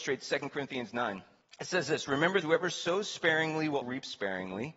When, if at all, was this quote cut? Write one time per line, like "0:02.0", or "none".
0:01.4
0:02.4
0:03.8